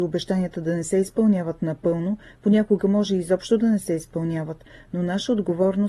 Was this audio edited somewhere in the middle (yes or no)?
no